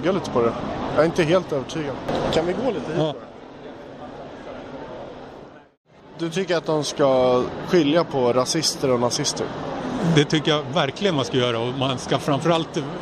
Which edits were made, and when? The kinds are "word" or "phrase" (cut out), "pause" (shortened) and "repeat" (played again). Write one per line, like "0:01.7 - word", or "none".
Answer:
none